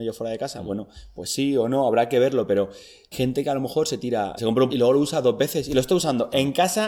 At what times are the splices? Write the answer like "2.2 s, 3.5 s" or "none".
3.1 s, 4.4 s, 4.7 s